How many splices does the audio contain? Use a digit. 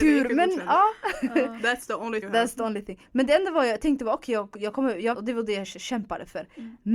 2